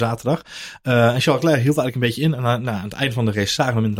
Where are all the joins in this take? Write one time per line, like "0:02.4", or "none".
none